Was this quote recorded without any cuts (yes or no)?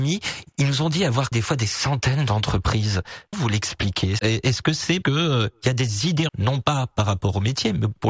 no